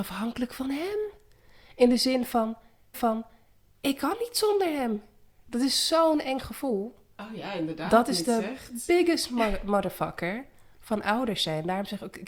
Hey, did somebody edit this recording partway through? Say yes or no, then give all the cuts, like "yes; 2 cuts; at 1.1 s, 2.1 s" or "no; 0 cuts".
yes; 1 cut; at 2.9 s